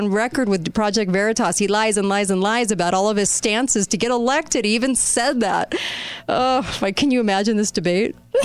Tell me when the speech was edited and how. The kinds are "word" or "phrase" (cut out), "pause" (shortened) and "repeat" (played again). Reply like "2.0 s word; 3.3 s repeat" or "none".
none